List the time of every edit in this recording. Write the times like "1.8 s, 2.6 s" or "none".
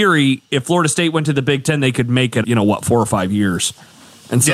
2.4 s